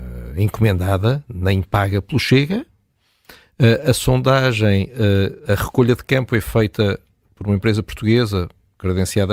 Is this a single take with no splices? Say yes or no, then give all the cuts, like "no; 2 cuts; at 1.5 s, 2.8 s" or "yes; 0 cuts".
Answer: yes; 0 cuts